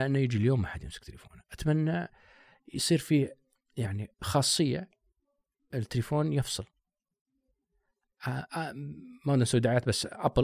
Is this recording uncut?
yes; 0 cuts

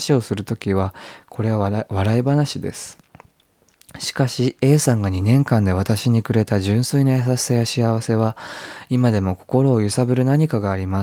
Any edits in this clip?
no; 0 cuts

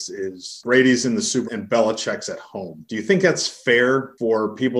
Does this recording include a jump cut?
yes; 1 cut; at 1.4 s

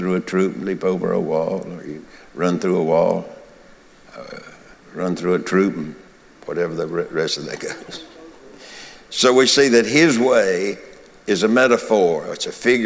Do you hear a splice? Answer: no; 0 cuts

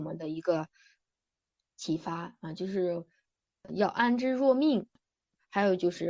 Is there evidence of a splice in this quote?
no; 0 cuts

